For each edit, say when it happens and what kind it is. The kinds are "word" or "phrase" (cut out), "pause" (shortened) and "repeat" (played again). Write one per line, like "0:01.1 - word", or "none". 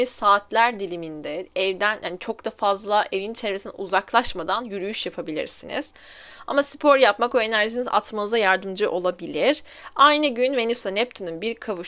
none